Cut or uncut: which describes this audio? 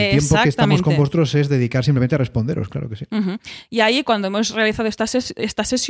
uncut